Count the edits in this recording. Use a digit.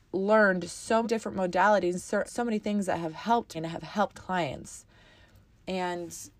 4